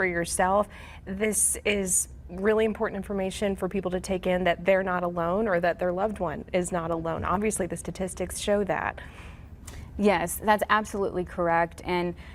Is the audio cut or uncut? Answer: uncut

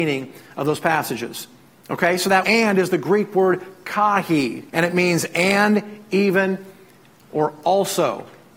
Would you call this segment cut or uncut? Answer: cut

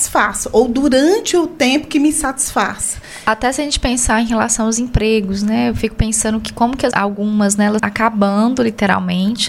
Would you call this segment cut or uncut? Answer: cut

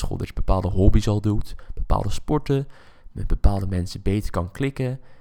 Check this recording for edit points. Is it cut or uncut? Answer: uncut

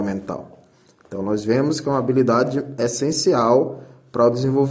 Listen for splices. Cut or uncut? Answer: uncut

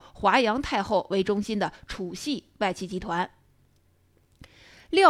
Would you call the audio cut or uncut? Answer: uncut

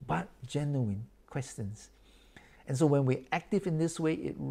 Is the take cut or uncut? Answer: uncut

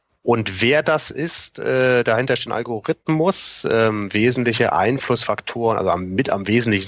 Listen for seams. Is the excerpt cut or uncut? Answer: cut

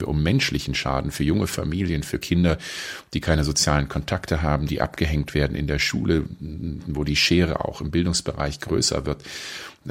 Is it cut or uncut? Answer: uncut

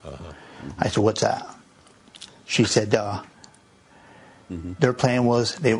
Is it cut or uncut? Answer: uncut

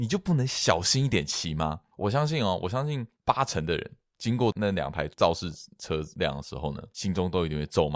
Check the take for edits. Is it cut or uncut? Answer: cut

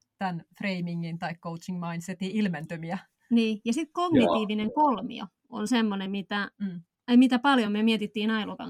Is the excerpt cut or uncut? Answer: uncut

